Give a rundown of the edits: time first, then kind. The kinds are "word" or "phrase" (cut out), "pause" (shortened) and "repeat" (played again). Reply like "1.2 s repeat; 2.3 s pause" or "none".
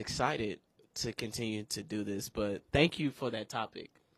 2.7 s pause